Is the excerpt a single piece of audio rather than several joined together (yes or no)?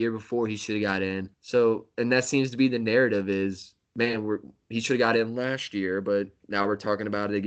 no